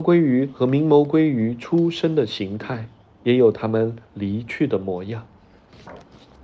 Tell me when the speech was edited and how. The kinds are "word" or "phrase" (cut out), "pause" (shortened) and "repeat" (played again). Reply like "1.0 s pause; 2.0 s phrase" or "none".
4.0 s pause